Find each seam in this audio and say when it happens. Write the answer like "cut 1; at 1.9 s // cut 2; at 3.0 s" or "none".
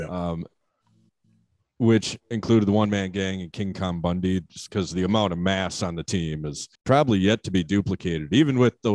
cut 1; at 6.8 s